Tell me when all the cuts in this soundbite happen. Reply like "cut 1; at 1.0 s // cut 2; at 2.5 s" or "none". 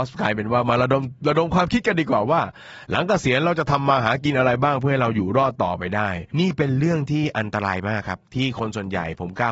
cut 1; at 6.3 s // cut 2; at 8.3 s